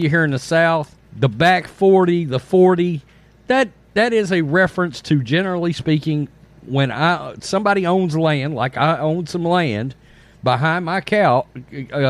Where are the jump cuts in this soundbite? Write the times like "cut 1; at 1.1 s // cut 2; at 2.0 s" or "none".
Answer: cut 1; at 1.0 s